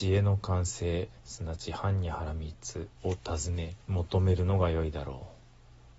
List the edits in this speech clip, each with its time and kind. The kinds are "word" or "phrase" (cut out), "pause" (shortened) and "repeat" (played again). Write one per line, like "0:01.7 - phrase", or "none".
0:01.2 - pause
0:03.0 - pause
0:03.8 - pause